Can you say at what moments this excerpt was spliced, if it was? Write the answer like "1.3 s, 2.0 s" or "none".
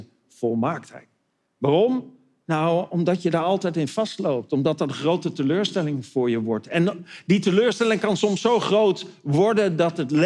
none